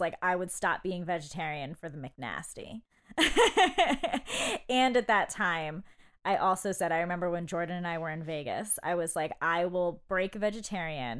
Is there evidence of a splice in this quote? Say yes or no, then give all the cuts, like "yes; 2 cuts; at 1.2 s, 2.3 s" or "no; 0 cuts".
no; 0 cuts